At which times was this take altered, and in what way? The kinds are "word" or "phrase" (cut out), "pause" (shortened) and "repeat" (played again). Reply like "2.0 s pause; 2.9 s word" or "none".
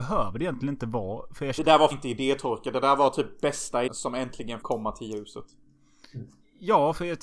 1.6 s word; 1.9 s word; 3.9 s word; 4.6 s word